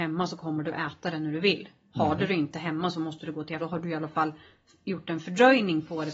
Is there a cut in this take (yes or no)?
yes